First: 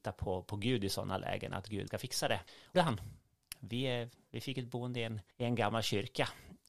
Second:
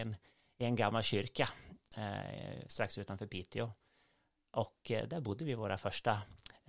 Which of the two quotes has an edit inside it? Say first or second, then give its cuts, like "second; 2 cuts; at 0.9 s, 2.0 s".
first; 3 cuts; at 1.9 s, 2.7 s, 5.3 s